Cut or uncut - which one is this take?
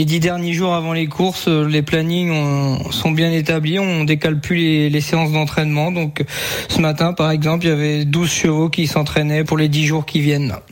cut